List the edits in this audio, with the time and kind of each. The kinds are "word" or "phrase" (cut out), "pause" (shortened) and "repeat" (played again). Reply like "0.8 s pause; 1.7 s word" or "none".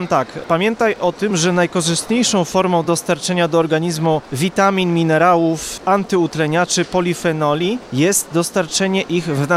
none